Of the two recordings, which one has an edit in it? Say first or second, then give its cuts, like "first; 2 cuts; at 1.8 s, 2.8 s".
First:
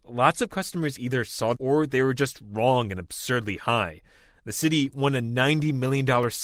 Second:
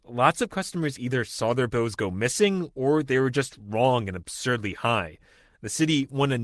first; 1 cut; at 1.5 s